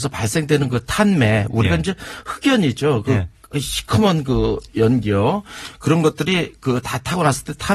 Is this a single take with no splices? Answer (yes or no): yes